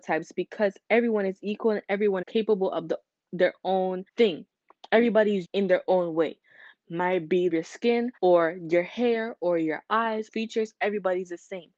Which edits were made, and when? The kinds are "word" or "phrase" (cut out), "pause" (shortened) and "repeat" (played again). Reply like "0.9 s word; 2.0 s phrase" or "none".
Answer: 2.2 s word; 4.1 s pause; 5.4 s word; 7.5 s phrase; 8.2 s pause; 10.3 s phrase